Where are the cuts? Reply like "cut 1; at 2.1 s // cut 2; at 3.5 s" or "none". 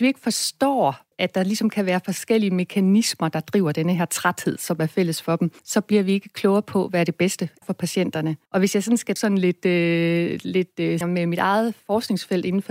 cut 1; at 1.1 s // cut 2; at 5.6 s // cut 3; at 7.6 s // cut 4; at 8.5 s // cut 5; at 9.2 s // cut 6; at 11.0 s